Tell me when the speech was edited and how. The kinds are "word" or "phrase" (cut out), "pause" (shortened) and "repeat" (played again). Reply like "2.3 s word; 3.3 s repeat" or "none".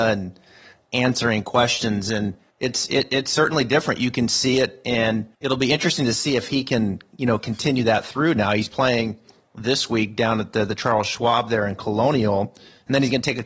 2.5 s pause; 5.3 s pause